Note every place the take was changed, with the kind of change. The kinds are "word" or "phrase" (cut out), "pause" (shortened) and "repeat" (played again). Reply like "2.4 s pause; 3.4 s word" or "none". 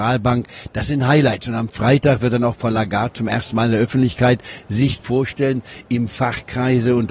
5.0 s word